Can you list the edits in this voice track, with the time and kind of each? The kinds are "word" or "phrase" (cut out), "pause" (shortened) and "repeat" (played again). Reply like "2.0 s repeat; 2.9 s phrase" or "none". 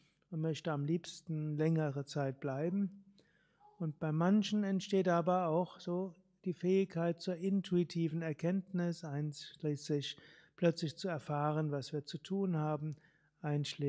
none